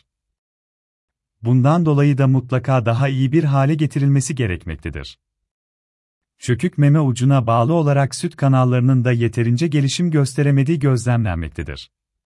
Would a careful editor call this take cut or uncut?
uncut